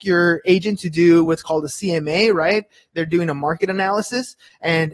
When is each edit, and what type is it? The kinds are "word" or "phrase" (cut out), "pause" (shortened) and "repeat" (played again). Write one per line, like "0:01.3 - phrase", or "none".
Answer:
none